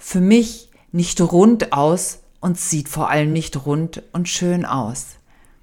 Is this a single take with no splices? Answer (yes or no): yes